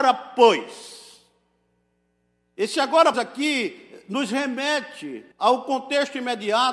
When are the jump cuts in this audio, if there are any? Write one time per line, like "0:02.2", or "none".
0:03.1
0:05.3